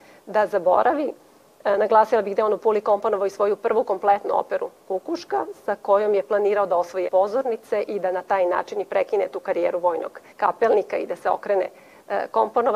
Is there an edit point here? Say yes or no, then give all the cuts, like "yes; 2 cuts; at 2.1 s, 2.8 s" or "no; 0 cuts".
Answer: yes; 2 cuts; at 7.1 s, 10.3 s